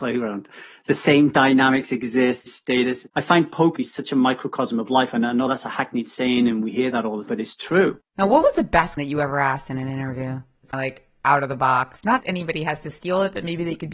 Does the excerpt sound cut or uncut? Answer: cut